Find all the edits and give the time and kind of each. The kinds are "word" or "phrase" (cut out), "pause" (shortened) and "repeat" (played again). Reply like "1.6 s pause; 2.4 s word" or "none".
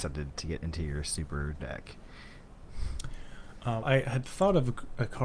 1.6 s word; 3.8 s word